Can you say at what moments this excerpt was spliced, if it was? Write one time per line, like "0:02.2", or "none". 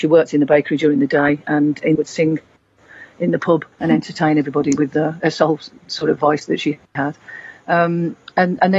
0:02.0
0:03.7
0:05.2

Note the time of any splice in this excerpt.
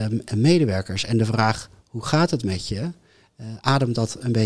none

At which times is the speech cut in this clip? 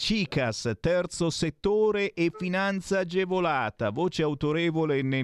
none

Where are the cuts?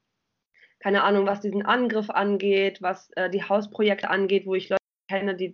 none

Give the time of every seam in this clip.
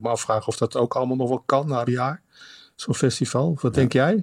0:01.9

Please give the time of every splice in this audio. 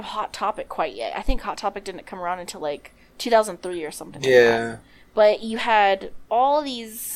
none

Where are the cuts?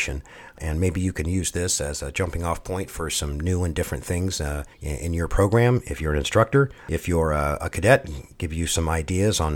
0:04.7
0:06.8

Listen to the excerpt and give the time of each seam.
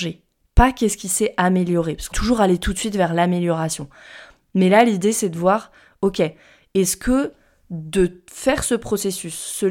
0:02.1

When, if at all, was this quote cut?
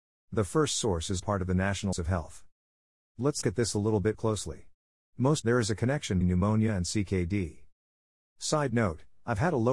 0:01.2
0:01.9
0:03.4
0:04.1
0:05.4
0:06.2

